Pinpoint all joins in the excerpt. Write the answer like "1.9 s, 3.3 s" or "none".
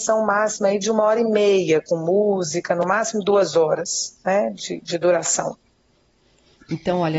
none